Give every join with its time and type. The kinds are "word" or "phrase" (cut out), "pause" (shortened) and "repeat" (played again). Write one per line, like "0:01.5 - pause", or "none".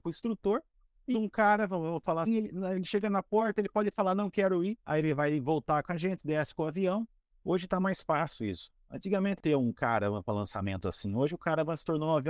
0:01.1 - phrase
0:02.3 - word
0:04.8 - pause
0:09.4 - phrase